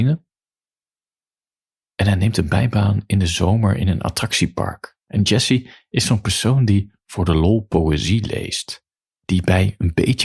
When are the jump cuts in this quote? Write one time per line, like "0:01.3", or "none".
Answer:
0:05.0